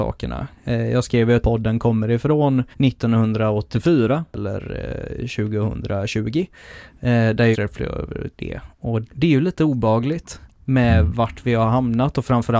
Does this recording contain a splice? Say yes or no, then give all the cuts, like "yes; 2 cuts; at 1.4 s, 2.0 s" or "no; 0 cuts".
yes; 4 cuts; at 1.4 s, 2.7 s, 7.5 s, 9.0 s